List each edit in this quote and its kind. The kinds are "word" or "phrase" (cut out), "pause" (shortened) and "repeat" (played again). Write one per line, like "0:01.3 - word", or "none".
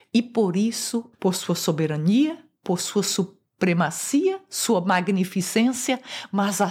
0:01.1 - phrase